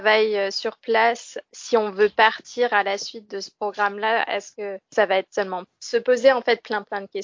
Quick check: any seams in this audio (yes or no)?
yes